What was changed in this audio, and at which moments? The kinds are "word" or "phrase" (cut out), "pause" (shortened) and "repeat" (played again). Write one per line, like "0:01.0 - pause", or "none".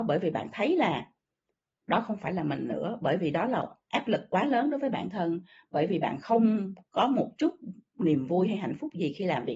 none